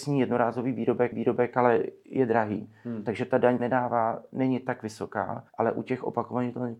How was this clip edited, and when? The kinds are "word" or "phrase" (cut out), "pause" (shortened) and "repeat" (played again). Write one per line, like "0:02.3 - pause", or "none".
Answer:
0:01.1 - repeat
0:03.6 - word
0:05.5 - pause

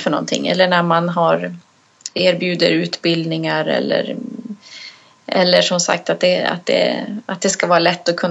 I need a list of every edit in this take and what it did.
none

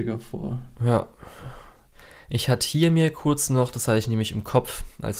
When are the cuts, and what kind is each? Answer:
none

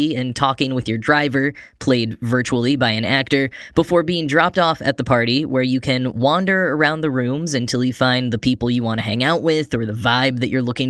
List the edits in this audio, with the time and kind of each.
none

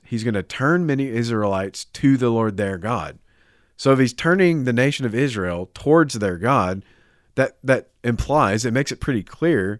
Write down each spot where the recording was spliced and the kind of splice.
none

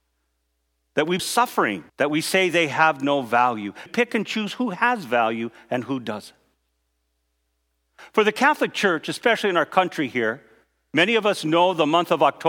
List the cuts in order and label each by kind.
0:01.2 - phrase
0:01.9 - pause
0:03.9 - phrase

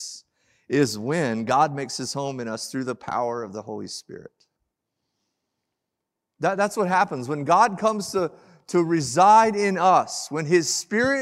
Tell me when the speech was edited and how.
none

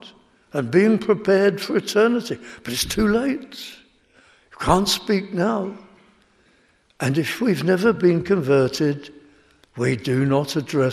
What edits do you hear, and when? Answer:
none

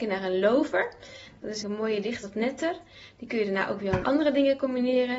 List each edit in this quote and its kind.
0:01.6 - word
0:02.2 - word
0:04.0 - word

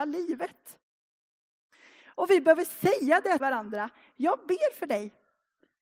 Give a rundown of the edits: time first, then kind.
0:03.4 - word

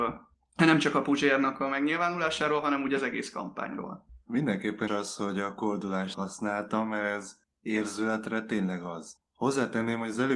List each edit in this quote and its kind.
0:04.9 - word
0:06.1 - word

